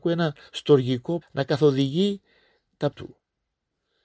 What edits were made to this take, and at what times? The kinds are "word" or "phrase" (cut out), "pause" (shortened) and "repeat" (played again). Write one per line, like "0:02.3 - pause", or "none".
0:01.2 - word
0:02.9 - word